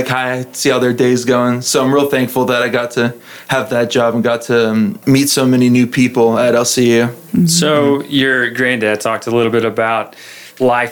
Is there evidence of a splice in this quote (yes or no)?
yes